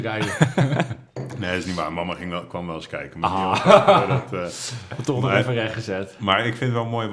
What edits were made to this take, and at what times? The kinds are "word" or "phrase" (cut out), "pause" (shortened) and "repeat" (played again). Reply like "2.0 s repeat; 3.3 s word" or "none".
1.1 s pause